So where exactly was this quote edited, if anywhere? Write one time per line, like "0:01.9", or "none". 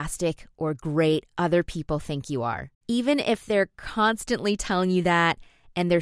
0:02.8